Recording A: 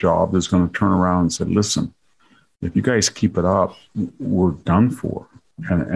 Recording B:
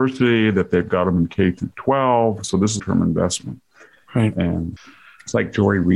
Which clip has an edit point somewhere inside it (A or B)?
B